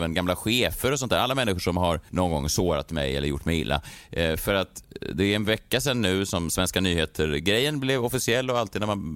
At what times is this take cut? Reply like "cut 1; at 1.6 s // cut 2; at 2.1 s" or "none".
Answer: none

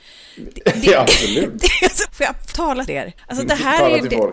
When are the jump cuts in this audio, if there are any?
cut 1; at 2.0 s // cut 2; at 2.5 s // cut 3; at 2.9 s // cut 4; at 3.2 s

